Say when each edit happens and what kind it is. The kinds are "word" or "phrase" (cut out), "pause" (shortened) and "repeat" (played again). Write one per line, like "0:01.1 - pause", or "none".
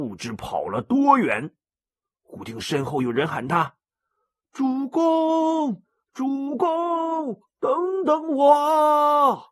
none